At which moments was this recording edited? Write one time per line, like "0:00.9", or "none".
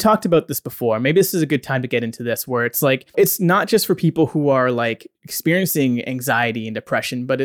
0:03.1
0:05.1

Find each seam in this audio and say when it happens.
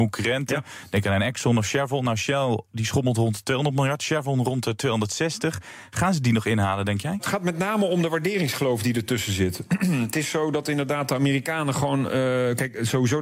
none

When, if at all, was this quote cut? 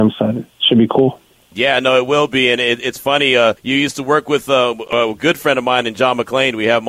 0:03.6

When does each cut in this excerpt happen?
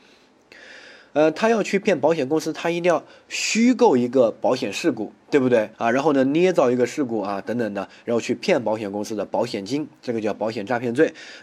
0:05.7

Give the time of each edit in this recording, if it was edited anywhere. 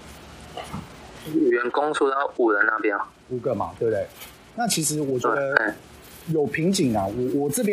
none

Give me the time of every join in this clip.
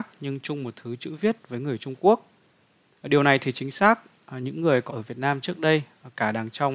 0:04.9

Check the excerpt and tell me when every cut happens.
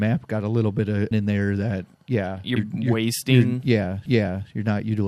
0:01.1
0:02.6
0:04.1

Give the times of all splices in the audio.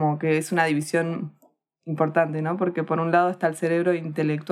none

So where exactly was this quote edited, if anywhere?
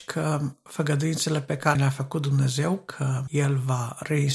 0:01.8

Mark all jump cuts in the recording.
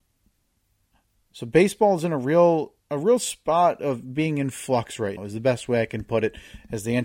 0:02.8
0:05.2

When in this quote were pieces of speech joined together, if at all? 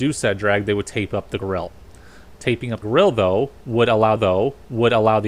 0:01.4
0:02.8
0:04.2

